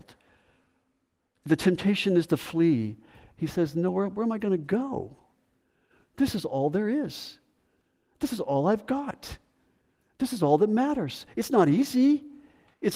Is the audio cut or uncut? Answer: uncut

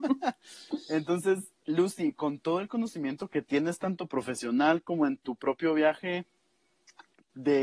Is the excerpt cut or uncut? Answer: cut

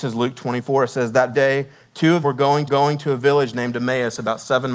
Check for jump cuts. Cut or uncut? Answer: cut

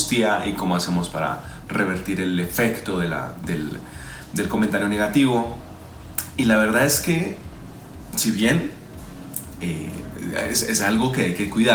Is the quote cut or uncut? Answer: uncut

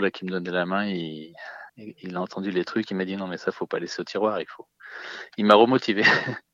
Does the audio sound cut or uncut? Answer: cut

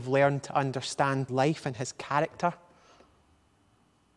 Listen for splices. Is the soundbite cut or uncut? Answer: cut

